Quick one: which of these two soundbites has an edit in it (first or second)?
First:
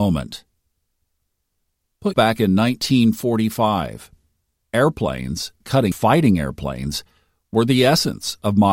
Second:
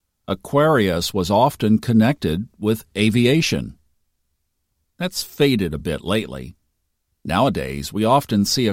first